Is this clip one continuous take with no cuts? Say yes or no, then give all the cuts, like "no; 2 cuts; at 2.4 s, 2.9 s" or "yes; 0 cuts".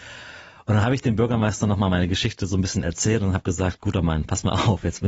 yes; 0 cuts